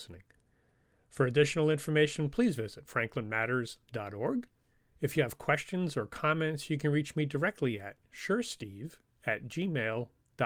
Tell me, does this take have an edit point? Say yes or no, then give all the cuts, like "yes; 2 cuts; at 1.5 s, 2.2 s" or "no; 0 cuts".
no; 0 cuts